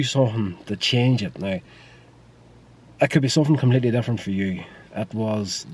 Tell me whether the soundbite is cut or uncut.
uncut